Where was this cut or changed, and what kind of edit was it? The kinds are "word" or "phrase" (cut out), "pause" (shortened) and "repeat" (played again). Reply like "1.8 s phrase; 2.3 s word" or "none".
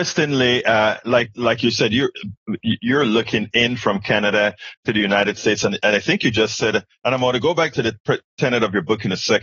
none